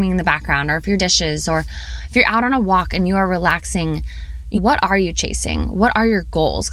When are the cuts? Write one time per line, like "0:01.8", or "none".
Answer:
0:01.0
0:04.5